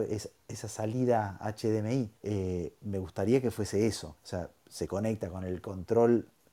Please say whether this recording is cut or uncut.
cut